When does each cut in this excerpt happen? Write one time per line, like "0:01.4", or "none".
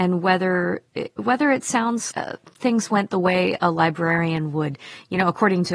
0:02.1